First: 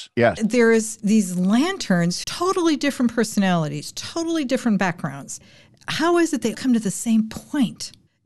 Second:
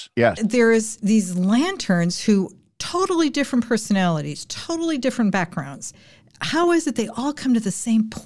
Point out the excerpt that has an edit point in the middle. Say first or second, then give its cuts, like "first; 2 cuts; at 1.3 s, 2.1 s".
first; 2 cuts; at 2.2 s, 6.5 s